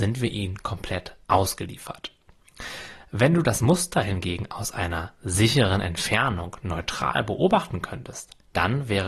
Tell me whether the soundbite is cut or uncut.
uncut